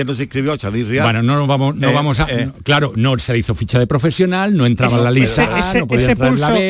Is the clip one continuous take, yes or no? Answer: yes